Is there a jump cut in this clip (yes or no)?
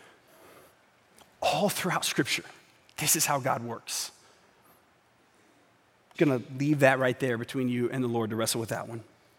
yes